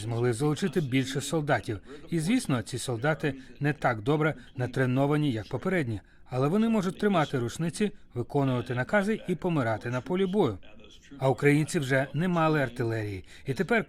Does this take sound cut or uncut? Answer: uncut